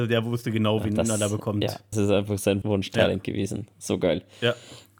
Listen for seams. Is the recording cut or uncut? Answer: cut